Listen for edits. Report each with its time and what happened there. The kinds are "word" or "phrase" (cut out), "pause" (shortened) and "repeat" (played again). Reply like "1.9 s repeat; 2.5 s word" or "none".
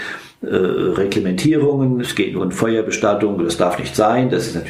2.0 s word; 2.4 s word